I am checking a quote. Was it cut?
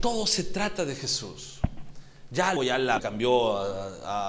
yes; 2 cuts; at 2.6 s, 3.0 s

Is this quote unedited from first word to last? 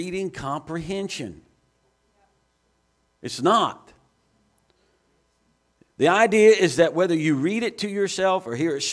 yes; 0 cuts

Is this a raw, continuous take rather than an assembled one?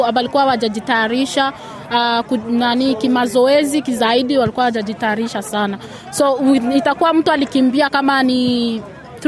yes; 0 cuts

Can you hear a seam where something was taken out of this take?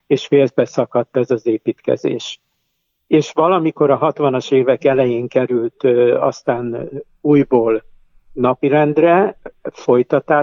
no; 0 cuts

